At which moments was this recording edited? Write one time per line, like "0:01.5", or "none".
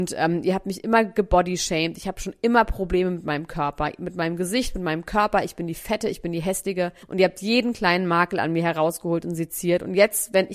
0:07.0